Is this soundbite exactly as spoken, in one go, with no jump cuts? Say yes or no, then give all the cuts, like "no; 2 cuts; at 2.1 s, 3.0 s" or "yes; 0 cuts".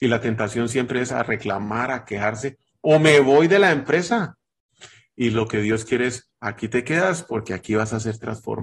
yes; 0 cuts